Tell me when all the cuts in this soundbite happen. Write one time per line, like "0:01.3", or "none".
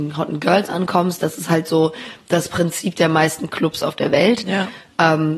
none